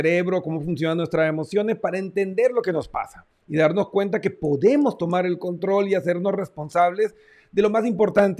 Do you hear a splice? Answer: no; 0 cuts

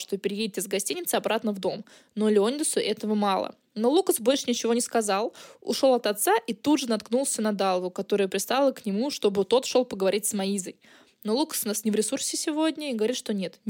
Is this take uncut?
yes; 0 cuts

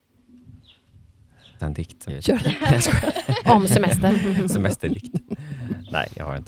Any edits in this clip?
yes; 2 cuts; at 1.6 s, 2.1 s

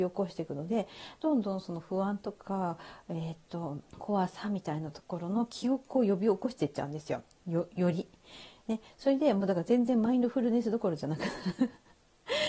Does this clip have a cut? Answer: yes; 1 cut; at 3.9 s

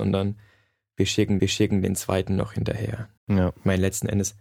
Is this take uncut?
no; 2 cuts; at 1.4 s, 3.2 s

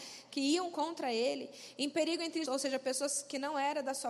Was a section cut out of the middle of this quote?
yes; 1 cut; at 2.5 s

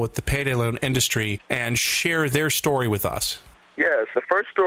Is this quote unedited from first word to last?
yes; 0 cuts

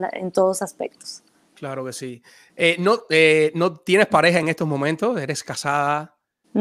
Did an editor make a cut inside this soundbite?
no; 0 cuts

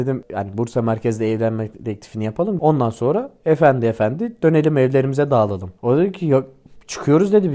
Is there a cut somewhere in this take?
yes; 1 cut; at 5.8 s

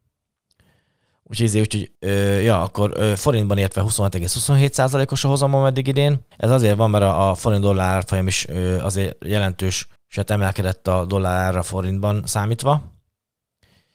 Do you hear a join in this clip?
yes; 3 cuts; at 1.9 s, 6.3 s, 10.0 s

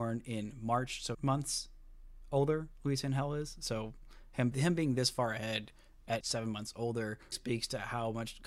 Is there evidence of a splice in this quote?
yes; 4 cuts; at 1.1 s, 4.5 s, 6.2 s, 7.3 s

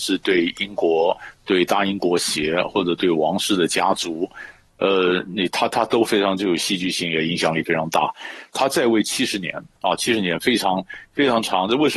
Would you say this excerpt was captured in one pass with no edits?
yes; 0 cuts

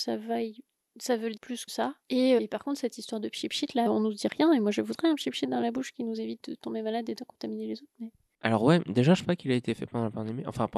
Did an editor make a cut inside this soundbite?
yes; 6 cuts; at 1.4 s, 1.7 s, 2.4 s, 3.9 s, 6.4 s, 9.2 s

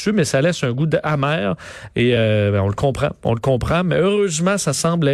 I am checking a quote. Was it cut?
no; 0 cuts

